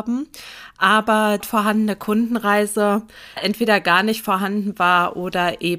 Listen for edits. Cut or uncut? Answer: cut